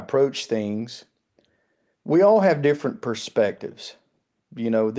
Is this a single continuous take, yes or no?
yes